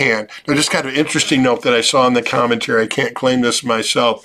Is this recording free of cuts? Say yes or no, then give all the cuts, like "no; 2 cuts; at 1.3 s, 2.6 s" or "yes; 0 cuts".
yes; 0 cuts